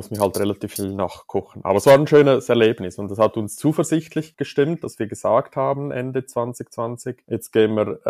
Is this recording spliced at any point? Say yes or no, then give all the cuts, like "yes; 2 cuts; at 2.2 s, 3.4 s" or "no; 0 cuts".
no; 0 cuts